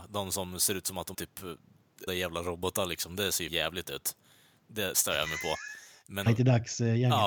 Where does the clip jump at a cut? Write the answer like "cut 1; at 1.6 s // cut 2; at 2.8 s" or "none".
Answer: cut 1; at 1.1 s // cut 2; at 2.1 s // cut 3; at 3.5 s // cut 4; at 4.9 s // cut 5; at 6.3 s

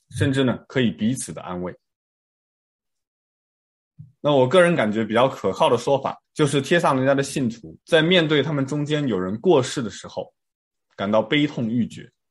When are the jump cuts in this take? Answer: cut 1; at 6.2 s // cut 2; at 7.8 s

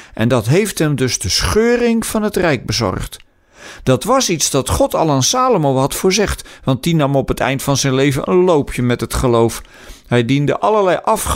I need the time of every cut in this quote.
none

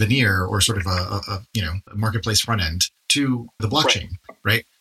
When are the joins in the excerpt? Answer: cut 1; at 1.9 s // cut 2; at 3.0 s // cut 3; at 3.6 s

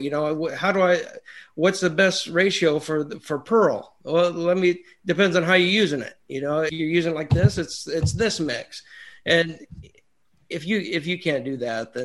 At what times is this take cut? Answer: cut 1; at 6.7 s

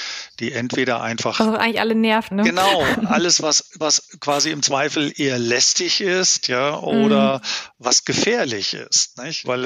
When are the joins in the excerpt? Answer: cut 1; at 2.3 s // cut 2; at 2.9 s // cut 3; at 3.8 s

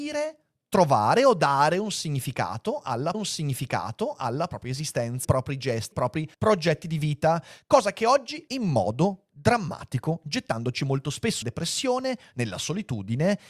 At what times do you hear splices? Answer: cut 1; at 3.1 s // cut 2; at 5.2 s // cut 3; at 5.9 s // cut 4; at 6.3 s // cut 5; at 8.5 s // cut 6; at 11.4 s

